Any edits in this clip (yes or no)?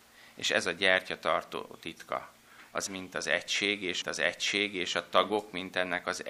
yes